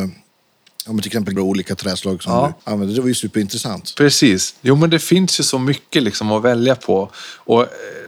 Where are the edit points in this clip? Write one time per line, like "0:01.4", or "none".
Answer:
0:01.4
0:02.6